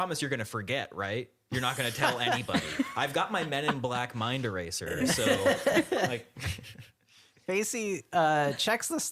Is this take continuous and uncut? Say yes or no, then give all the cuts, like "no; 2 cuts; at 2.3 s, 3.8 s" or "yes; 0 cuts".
yes; 0 cuts